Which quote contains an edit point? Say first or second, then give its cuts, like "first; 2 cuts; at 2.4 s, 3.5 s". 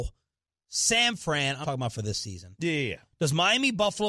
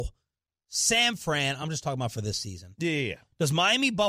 first; 1 cut; at 1.6 s